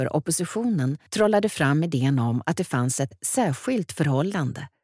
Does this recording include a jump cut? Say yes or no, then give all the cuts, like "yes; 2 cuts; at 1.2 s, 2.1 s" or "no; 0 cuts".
yes; 1 cut; at 1.1 s